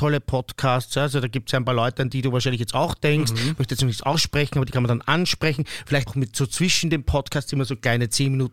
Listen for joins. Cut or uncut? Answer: cut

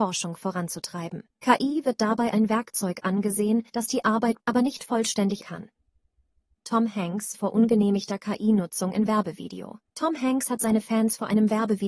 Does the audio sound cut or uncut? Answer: cut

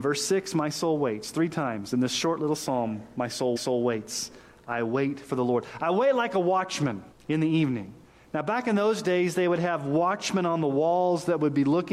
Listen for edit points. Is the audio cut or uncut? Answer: cut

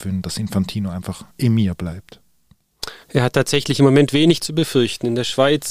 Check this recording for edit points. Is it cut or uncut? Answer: cut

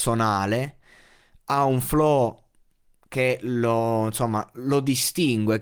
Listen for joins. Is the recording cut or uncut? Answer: uncut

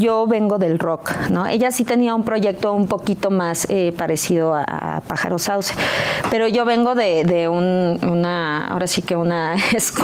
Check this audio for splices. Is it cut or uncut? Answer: uncut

